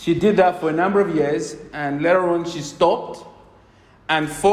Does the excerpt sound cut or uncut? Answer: uncut